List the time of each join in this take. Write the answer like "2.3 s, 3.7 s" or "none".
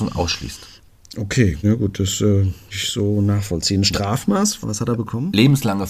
1.6 s, 2.7 s, 4.6 s